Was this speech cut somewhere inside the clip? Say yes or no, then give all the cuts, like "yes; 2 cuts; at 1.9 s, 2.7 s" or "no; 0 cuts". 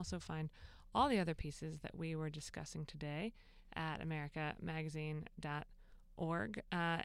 no; 0 cuts